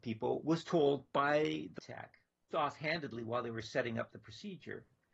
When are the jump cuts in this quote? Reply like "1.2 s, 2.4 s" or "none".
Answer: 1.8 s, 2.5 s